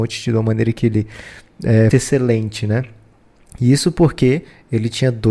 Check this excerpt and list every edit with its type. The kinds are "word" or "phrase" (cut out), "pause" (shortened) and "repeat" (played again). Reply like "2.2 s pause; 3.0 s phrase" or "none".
1.9 s word